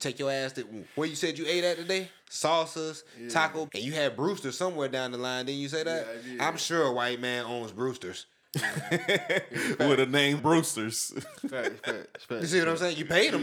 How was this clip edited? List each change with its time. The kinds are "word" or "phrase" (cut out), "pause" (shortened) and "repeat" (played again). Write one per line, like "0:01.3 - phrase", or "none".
0:02.2 - pause
0:03.7 - word
0:10.4 - word